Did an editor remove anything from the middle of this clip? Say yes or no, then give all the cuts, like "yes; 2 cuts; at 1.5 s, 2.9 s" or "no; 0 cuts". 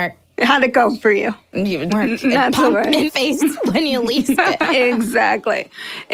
yes; 4 cuts; at 1.9 s, 2.7 s, 3.1 s, 4.4 s